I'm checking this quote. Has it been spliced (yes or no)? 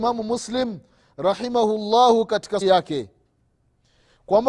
yes